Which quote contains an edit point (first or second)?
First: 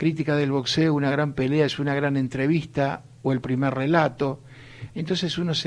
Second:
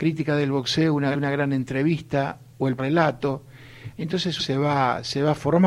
second